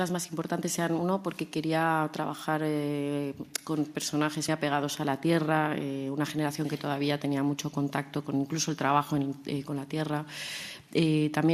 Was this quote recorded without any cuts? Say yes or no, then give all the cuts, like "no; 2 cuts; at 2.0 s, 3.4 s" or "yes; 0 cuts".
no; 1 cut; at 4.5 s